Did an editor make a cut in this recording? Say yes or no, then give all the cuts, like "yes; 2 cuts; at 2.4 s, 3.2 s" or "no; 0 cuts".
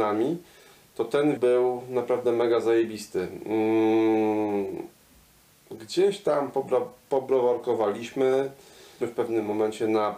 yes; 3 cuts; at 1.4 s, 5.4 s, 9.0 s